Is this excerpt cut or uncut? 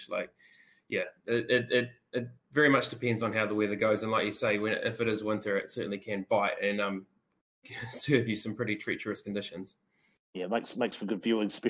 uncut